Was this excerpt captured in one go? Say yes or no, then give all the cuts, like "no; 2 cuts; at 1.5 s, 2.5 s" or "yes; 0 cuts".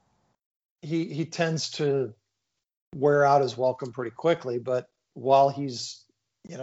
yes; 0 cuts